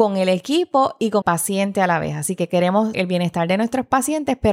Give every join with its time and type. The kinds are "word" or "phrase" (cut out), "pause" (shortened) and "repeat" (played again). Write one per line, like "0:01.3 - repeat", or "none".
0:01.2 - word
0:02.9 - word